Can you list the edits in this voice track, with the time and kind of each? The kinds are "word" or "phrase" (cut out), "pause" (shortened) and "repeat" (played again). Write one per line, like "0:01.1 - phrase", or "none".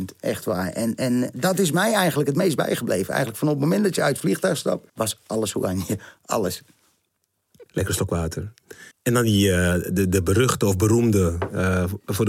0:04.9 - pause
0:07.7 - pause
0:08.9 - pause